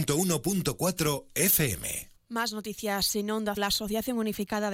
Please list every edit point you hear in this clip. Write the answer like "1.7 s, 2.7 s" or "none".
3.6 s